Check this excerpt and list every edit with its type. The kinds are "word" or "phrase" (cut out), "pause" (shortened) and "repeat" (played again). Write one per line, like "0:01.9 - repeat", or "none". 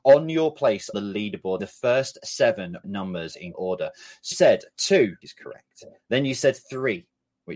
0:00.9 - word
0:01.6 - word
0:02.8 - word
0:03.5 - word
0:04.3 - word
0:05.2 - word

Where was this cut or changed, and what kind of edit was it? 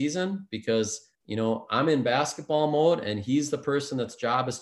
0:01.1 - pause

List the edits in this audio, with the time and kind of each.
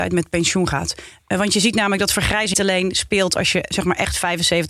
0:02.5 - word

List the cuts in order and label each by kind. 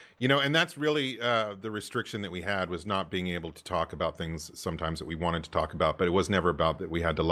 none

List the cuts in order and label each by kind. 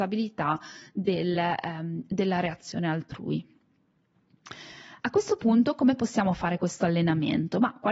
none

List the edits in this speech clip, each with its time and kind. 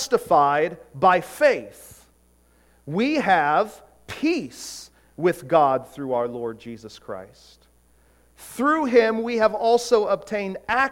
none

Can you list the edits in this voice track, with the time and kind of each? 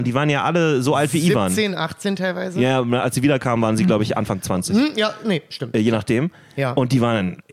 none

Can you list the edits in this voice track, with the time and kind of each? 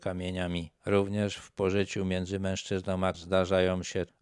0:03.1 - word

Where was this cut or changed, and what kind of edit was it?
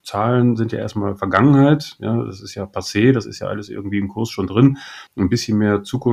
0:05.1 - pause

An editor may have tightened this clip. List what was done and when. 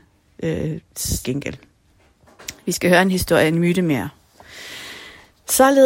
0:01.2 - word

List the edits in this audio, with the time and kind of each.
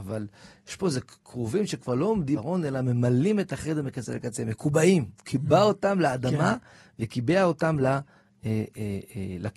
0:02.4 - word
0:05.1 - pause

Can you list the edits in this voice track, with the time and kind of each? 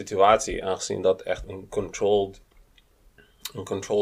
0:01.4 - word

